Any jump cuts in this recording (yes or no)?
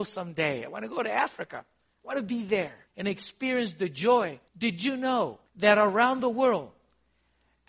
yes